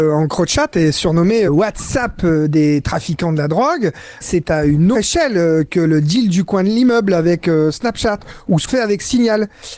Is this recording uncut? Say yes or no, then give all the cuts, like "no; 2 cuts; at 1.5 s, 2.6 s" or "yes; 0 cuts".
no; 4 cuts; at 1.5 s, 4.2 s, 4.9 s, 8.7 s